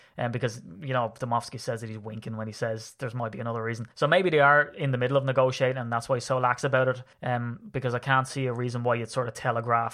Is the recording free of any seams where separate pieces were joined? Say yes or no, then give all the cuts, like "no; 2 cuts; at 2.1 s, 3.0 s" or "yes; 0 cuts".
no; 2 cuts; at 3.9 s, 7.1 s